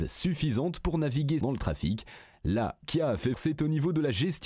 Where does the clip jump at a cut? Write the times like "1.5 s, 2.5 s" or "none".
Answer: 1.4 s, 2.8 s, 3.3 s